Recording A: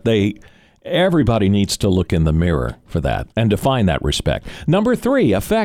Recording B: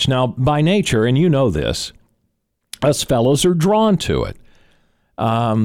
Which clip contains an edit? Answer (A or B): A